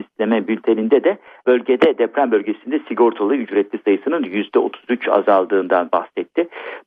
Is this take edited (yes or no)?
no